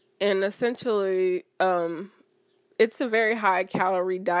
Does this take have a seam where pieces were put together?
no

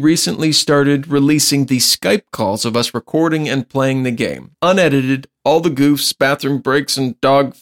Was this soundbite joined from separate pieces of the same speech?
yes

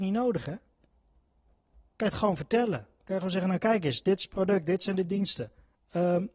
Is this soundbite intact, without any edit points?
yes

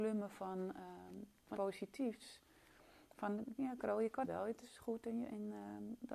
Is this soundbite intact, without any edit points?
no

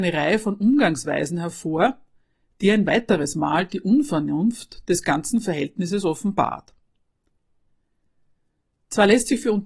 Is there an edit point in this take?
no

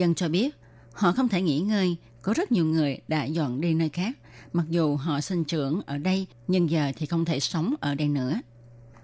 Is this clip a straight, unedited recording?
yes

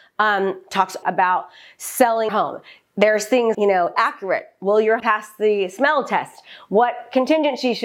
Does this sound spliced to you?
yes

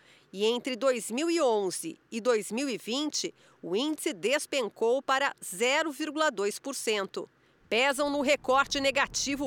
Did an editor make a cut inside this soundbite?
no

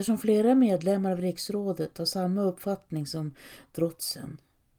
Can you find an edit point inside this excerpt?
no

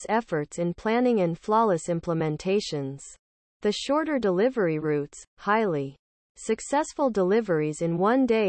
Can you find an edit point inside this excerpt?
no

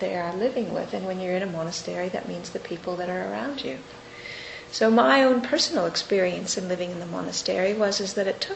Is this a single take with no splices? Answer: yes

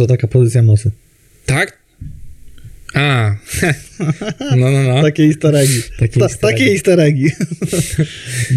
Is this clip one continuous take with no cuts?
yes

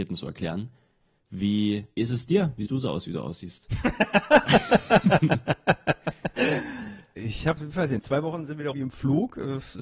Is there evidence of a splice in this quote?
yes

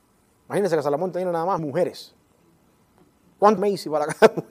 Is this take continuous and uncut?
no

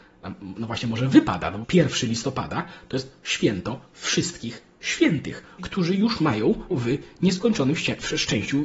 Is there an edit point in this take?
yes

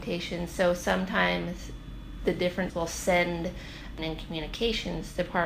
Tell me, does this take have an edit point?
yes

